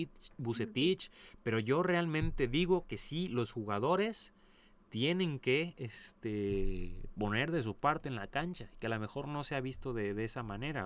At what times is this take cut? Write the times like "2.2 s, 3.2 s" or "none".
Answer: none